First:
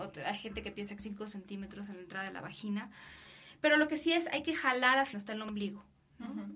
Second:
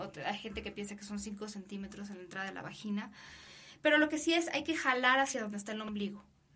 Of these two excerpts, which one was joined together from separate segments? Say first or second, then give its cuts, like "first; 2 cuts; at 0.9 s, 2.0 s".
first; 2 cuts; at 1.0 s, 5.1 s